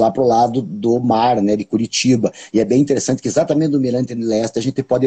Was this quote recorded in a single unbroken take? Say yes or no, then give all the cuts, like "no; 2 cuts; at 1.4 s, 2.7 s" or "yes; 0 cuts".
yes; 0 cuts